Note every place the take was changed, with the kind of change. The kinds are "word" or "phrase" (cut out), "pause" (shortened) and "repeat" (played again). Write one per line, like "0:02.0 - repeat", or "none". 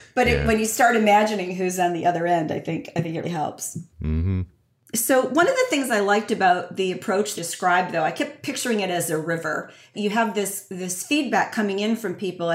0:03.2 - word
0:03.9 - pause
0:07.4 - phrase